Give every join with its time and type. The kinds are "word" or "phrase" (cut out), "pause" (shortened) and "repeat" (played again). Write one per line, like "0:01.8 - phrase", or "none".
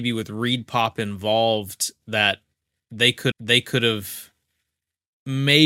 0:03.3 - repeat